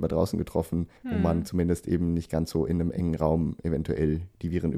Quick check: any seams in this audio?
yes; 1 cut; at 1.0 s

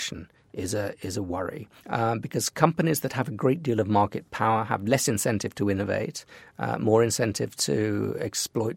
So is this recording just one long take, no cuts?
no; 1 cut; at 1.8 s

